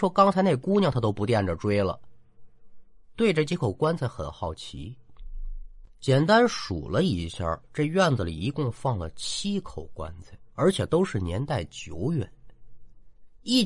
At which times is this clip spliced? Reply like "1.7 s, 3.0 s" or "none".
5.9 s, 7.6 s, 10.5 s